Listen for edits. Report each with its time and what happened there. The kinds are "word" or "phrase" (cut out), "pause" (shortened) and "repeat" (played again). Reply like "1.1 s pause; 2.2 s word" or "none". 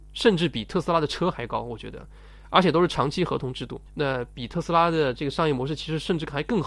3.9 s pause